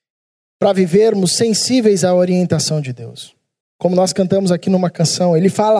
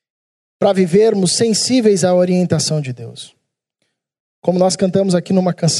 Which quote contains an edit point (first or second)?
first